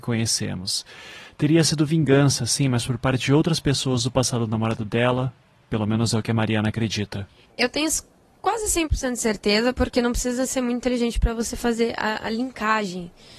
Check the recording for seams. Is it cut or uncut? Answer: uncut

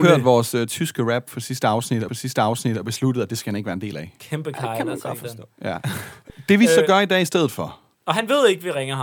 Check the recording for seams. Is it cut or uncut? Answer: cut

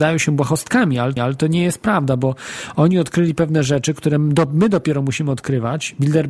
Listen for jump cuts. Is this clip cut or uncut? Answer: cut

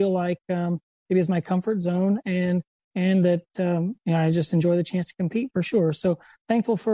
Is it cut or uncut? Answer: uncut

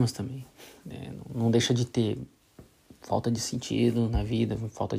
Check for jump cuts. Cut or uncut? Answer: uncut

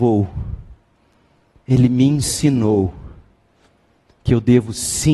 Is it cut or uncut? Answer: uncut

